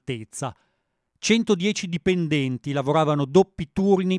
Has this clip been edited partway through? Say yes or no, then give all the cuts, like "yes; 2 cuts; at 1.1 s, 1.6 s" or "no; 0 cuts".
no; 0 cuts